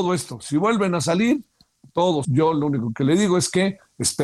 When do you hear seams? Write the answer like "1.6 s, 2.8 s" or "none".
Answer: 2.2 s